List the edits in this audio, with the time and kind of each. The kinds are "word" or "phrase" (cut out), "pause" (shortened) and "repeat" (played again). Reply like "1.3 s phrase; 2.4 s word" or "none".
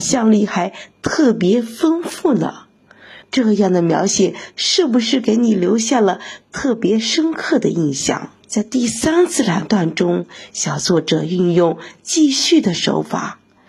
3.2 s pause; 8.4 s pause